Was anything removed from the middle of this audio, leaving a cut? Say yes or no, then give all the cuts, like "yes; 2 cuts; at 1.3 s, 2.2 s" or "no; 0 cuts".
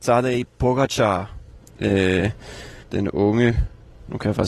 yes; 1 cut; at 2.8 s